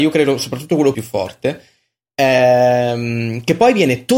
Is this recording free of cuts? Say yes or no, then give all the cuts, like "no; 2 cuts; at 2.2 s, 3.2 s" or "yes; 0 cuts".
no; 1 cut; at 0.9 s